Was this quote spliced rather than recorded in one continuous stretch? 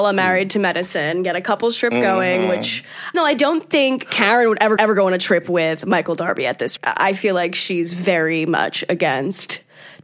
yes; 3 cuts; at 3.1 s, 4.8 s, 6.8 s

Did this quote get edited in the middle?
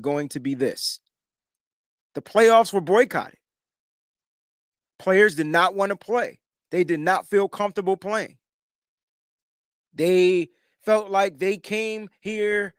no; 0 cuts

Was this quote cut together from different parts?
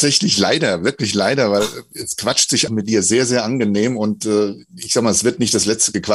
yes; 1 cut; at 2.7 s

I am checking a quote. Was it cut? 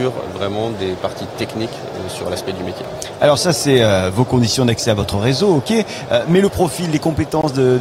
no; 0 cuts

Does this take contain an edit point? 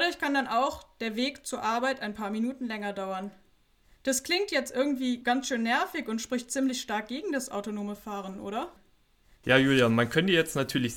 no; 0 cuts

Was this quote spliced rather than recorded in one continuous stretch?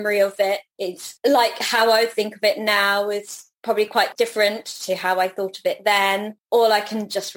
no; 0 cuts

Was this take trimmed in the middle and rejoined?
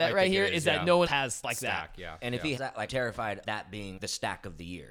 yes; 6 cuts; at 1.1 s, 1.4 s, 2.6 s, 2.9 s, 3.4 s, 4.0 s

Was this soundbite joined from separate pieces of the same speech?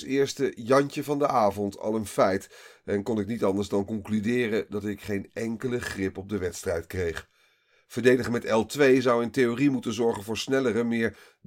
no; 0 cuts

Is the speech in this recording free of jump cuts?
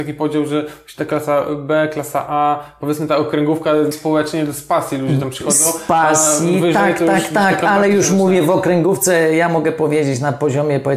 no; 1 cut; at 3.9 s

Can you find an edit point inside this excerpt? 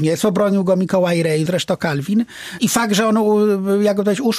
no; 0 cuts

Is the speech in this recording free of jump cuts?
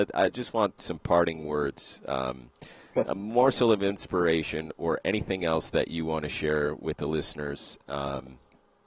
yes; 0 cuts

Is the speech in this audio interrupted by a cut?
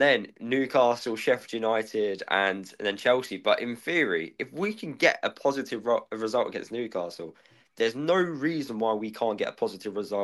no; 0 cuts

